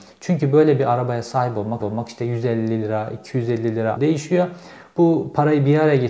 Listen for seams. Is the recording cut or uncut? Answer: cut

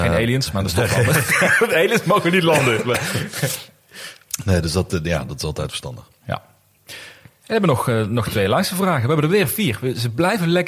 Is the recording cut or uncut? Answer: uncut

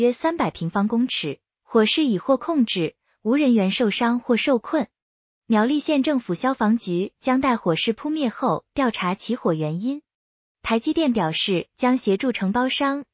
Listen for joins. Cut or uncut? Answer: uncut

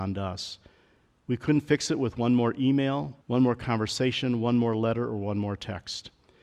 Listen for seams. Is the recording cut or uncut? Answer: cut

